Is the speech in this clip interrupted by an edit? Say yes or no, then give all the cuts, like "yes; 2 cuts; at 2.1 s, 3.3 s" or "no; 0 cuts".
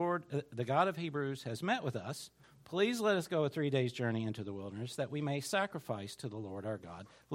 yes; 1 cut; at 2.4 s